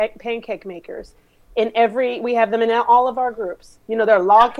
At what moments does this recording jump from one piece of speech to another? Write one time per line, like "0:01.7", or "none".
none